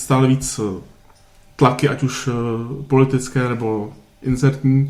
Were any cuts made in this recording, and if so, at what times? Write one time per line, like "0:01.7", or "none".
none